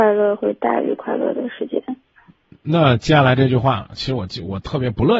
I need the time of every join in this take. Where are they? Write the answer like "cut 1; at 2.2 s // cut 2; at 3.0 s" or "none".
none